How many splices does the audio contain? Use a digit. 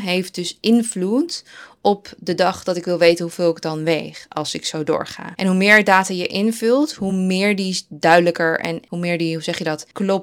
0